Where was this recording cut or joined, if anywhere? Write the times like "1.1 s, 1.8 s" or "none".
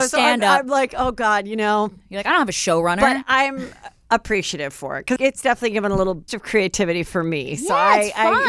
5.2 s, 6.3 s